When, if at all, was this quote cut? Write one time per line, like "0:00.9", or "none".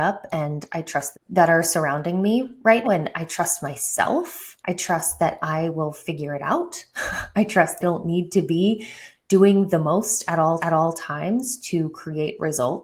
0:01.1
0:02.8
0:04.6
0:07.8
0:10.6

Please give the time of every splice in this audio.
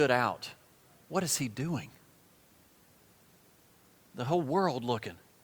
none

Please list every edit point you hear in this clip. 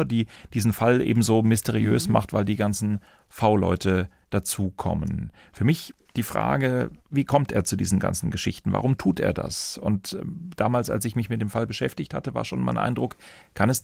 none

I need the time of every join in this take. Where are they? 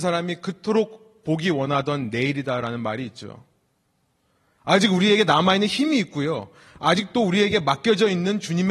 none

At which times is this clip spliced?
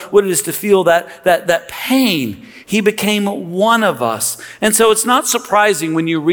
0:01.4

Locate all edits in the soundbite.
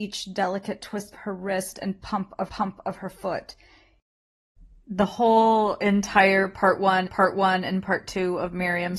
0:01.1
0:02.5
0:07.1

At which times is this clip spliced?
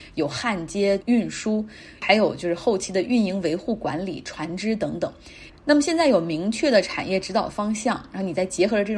0:01.0

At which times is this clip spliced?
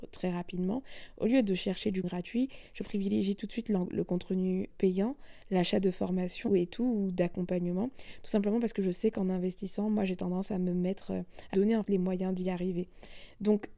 0:02.0
0:04.7
0:06.5
0:11.5
0:11.8

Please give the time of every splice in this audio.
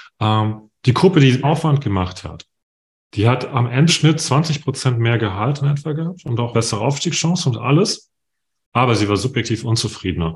0:01.4
0:03.9
0:06.5

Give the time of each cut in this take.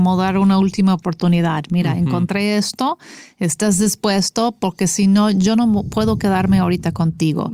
none

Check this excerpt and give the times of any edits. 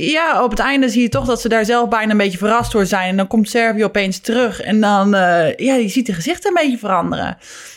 none

